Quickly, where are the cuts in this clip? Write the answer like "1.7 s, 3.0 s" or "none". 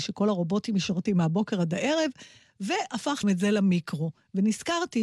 1.1 s, 3.2 s